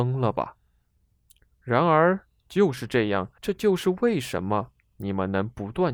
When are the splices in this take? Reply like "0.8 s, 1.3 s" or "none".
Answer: 3.4 s